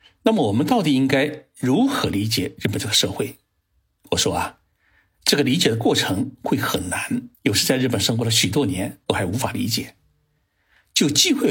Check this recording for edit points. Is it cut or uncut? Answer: cut